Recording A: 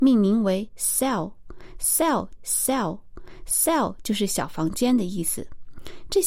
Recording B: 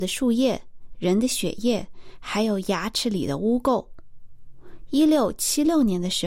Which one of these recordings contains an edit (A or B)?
A